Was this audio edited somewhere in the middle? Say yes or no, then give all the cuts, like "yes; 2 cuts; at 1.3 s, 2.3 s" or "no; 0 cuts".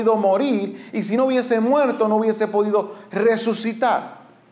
no; 0 cuts